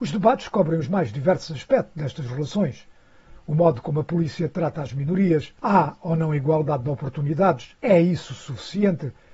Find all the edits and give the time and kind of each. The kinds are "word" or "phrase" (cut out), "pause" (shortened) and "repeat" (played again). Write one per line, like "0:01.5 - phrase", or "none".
0:05.6 - pause
0:07.8 - pause